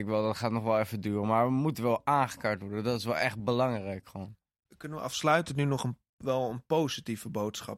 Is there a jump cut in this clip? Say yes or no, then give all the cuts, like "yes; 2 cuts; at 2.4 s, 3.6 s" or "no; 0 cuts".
no; 0 cuts